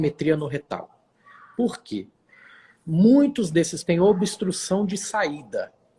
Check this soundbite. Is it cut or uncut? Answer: cut